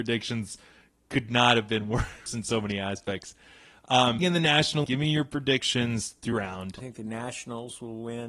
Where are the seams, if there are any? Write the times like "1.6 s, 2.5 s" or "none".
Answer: 2.3 s, 4.2 s, 4.8 s, 6.3 s, 6.8 s